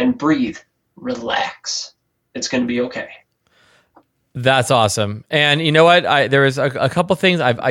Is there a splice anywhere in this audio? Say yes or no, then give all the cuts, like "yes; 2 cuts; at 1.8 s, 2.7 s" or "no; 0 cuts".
no; 0 cuts